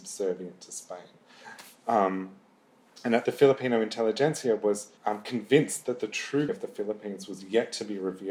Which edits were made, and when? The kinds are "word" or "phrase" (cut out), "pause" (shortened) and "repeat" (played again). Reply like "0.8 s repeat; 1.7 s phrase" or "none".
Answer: 3.3 s phrase; 5.0 s pause; 6.5 s word